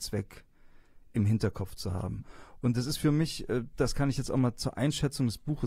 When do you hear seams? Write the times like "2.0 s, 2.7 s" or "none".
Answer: none